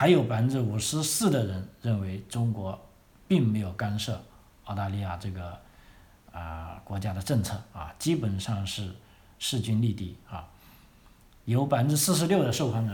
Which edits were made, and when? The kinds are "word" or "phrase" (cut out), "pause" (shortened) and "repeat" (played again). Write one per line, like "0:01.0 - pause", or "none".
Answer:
none